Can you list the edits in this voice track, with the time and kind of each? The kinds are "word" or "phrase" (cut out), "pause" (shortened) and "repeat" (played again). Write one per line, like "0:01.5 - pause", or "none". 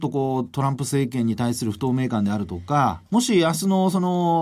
0:03.1 - pause